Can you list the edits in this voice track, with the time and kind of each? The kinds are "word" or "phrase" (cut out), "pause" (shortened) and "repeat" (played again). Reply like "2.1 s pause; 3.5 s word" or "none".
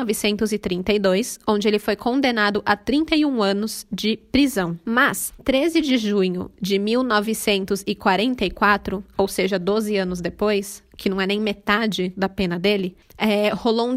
5.4 s word